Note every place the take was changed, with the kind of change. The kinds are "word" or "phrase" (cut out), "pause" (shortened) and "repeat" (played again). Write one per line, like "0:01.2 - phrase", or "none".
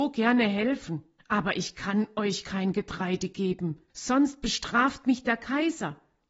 0:01.2 - pause
0:03.9 - pause